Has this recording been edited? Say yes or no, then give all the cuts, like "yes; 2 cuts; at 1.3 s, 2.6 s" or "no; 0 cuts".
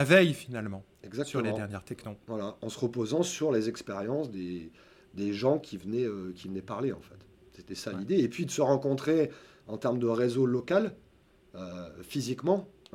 no; 0 cuts